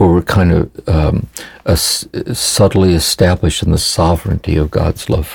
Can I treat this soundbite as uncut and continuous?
yes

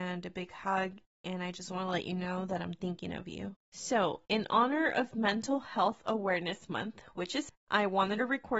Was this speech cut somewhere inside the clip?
yes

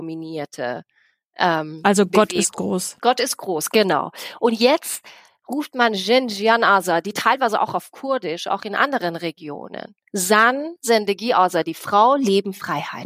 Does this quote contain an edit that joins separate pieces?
no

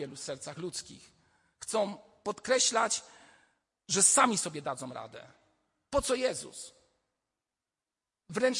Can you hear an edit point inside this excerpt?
no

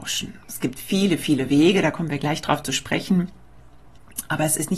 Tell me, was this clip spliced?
no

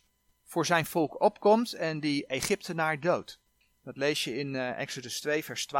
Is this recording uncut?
yes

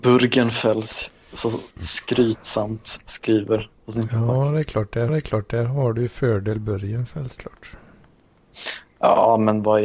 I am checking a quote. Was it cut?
yes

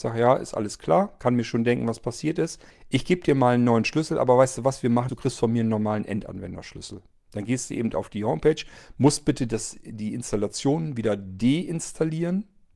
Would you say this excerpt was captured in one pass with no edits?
no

